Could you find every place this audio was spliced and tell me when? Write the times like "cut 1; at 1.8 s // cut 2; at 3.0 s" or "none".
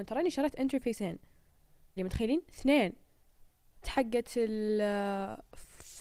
cut 1; at 2.0 s // cut 2; at 3.8 s